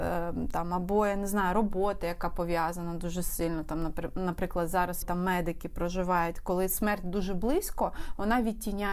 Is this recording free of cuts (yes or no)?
no